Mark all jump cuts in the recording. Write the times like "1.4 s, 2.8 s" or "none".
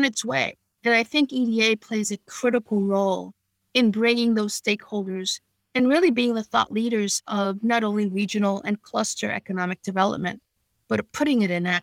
none